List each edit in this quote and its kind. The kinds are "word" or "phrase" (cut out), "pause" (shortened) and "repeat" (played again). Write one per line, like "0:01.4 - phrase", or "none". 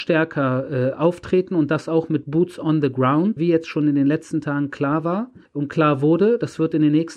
0:03.4 - word
0:05.5 - pause

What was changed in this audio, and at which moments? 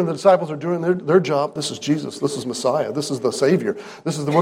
none

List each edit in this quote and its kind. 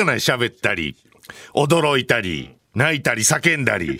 0:02.6 - pause

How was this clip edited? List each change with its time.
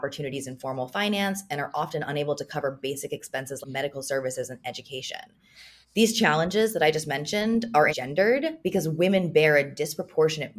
0:03.6 - word
0:05.8 - pause
0:07.9 - word
0:08.6 - pause

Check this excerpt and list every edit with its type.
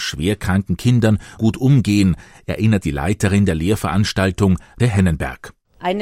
0:01.4 - word
0:02.8 - word
0:04.8 - word

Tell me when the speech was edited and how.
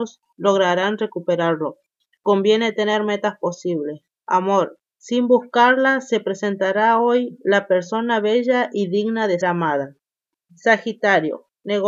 0:09.4 - word

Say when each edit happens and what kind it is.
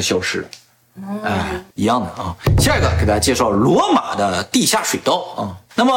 0:01.7 - pause

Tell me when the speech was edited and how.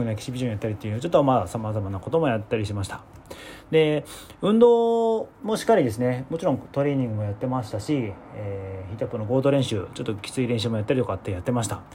0:05.3 - pause

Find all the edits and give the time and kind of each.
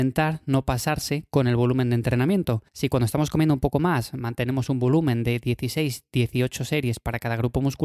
0:02.7 - pause

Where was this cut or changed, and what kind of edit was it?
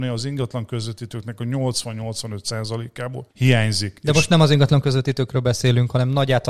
0:03.3 - pause

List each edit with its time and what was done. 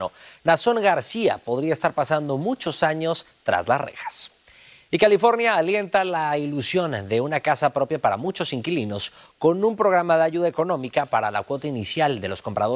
none

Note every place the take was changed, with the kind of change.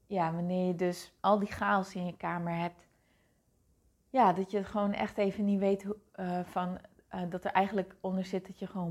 0:01.2 - pause

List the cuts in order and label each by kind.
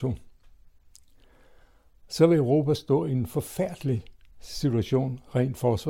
none

